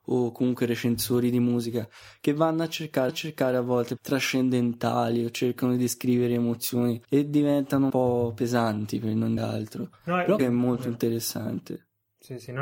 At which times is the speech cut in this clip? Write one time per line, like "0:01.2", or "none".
0:03.1
0:04.0
0:07.0
0:07.9
0:09.4
0:10.4

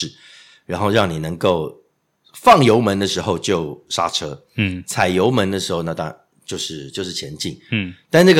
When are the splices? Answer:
none

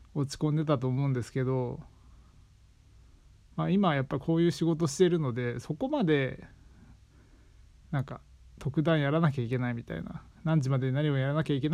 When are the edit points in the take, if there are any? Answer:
0:10.3

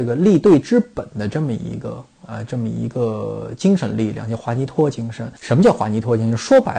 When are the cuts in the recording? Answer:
0:05.4

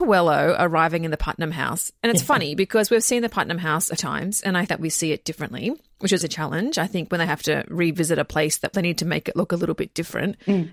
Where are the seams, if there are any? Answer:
0:04.0
0:04.7
0:06.2
0:08.7

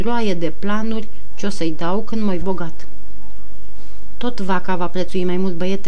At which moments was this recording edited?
0:02.4

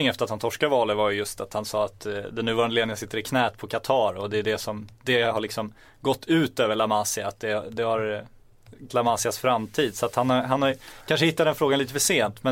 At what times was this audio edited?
0:08.9

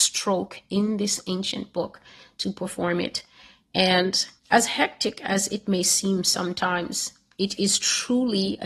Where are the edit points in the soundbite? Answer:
0:04.4

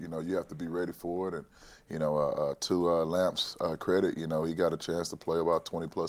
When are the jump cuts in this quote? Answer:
none

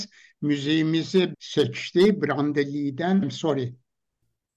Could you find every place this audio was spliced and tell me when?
0:01.3
0:03.2

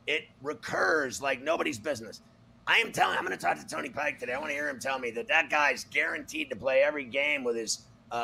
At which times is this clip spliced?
none

